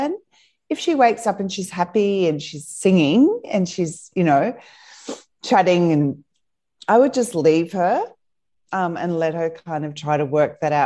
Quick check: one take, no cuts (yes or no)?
yes